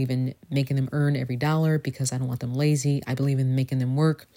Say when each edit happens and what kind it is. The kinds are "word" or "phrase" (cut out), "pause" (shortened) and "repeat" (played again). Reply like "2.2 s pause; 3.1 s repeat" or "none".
none